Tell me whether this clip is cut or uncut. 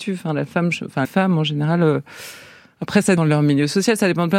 cut